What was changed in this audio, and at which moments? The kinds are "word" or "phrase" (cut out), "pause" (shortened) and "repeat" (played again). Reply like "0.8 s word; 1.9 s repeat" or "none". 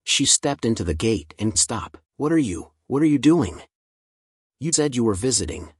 1.5 s phrase; 2.0 s pause; 4.7 s word